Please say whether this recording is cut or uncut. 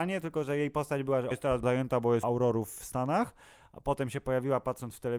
cut